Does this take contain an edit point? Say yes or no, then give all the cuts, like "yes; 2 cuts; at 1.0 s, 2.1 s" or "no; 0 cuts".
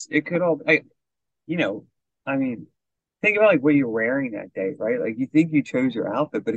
no; 0 cuts